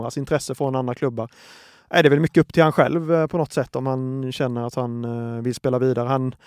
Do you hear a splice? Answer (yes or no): no